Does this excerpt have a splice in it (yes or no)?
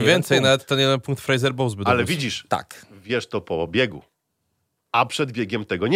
no